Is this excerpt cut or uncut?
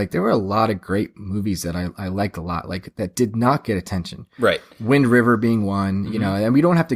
uncut